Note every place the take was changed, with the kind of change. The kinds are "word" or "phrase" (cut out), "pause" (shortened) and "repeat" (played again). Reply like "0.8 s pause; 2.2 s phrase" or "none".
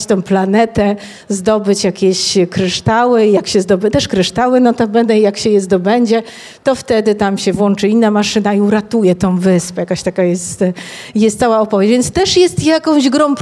none